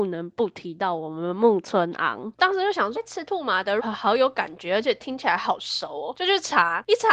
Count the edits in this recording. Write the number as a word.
two